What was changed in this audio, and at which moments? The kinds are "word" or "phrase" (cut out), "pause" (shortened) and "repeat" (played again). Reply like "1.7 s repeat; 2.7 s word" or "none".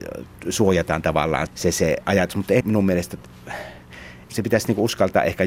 1.5 s word; 2.6 s word; 4.2 s word

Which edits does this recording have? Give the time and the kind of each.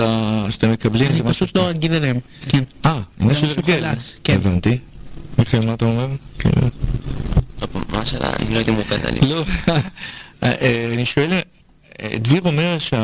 none

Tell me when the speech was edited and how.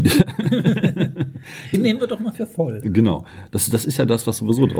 1.7 s word

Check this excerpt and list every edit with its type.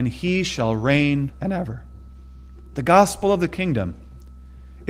1.3 s word

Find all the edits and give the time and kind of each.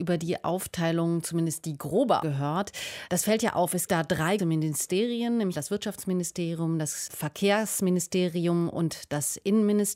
2.2 s phrase; 3.9 s word; 4.4 s word; 5.5 s word

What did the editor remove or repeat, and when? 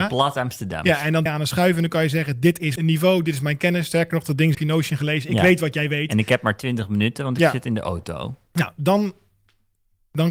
1.3 s word; 2.8 s phrase; 4.5 s phrase

